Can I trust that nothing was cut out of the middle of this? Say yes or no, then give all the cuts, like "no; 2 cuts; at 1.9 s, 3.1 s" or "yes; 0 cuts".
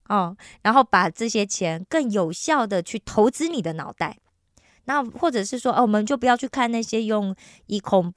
yes; 0 cuts